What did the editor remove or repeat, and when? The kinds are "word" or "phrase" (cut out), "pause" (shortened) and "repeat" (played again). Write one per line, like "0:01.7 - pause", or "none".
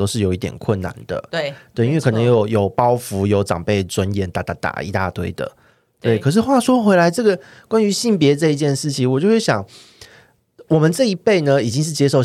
none